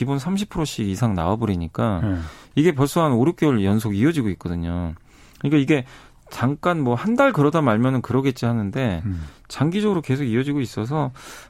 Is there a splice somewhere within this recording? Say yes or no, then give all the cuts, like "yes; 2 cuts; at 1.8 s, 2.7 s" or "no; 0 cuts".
no; 0 cuts